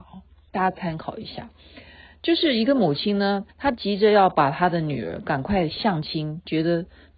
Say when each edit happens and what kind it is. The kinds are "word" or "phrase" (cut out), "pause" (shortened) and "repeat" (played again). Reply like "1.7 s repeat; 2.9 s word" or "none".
3.5 s pause